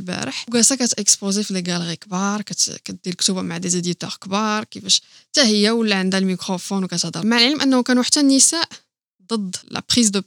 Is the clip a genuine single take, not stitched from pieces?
yes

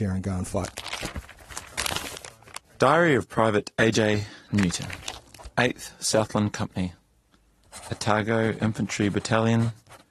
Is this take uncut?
yes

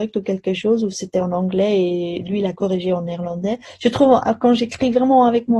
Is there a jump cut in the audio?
no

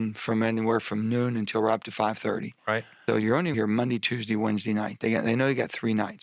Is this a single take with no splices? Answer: no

